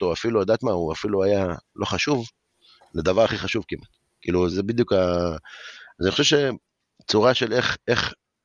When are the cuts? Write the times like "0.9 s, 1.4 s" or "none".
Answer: 4.5 s

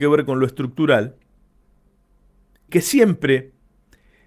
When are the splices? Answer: 2.7 s

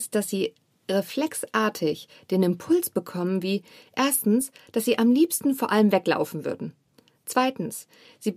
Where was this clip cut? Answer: none

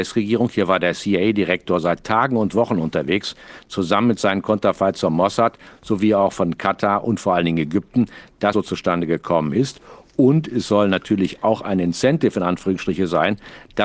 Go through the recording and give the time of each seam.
8.5 s

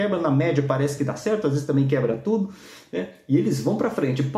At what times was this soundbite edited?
none

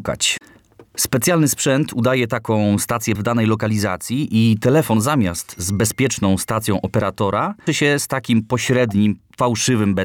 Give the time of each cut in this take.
3.1 s, 7.7 s

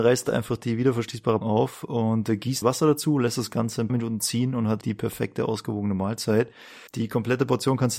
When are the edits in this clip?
1.4 s, 2.6 s, 3.9 s, 4.8 s, 6.9 s

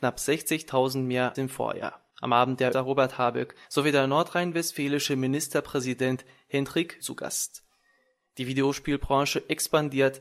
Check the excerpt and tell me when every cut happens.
1.3 s, 2.1 s, 2.7 s, 3.6 s, 7.0 s

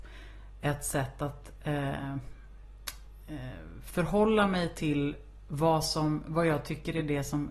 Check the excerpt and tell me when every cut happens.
none

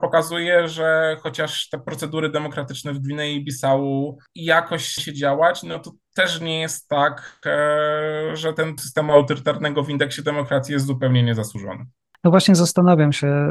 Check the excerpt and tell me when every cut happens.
5.0 s, 8.8 s

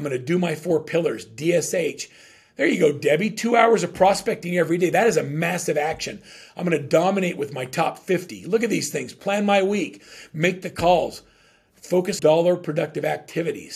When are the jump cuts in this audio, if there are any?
12.2 s

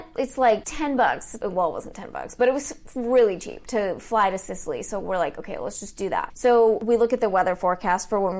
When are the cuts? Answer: none

